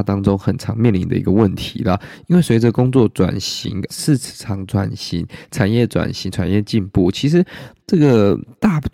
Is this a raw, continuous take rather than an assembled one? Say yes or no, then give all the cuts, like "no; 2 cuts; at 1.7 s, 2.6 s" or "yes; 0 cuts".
no; 1 cut; at 3.9 s